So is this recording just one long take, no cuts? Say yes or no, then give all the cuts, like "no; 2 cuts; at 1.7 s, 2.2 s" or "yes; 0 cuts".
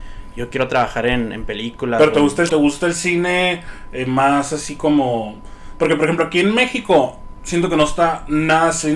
no; 1 cut; at 2.5 s